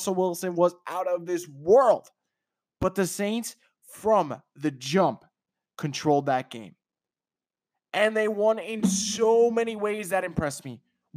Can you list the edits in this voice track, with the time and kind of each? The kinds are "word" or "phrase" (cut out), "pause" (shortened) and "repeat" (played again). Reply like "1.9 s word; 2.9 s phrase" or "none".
none